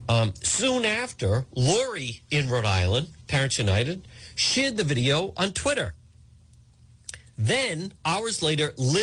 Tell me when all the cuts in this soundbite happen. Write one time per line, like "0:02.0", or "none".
0:08.0